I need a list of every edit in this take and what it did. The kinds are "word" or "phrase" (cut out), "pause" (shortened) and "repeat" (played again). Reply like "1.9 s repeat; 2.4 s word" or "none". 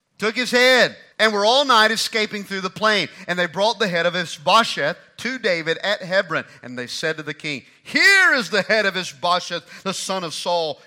1.1 s pause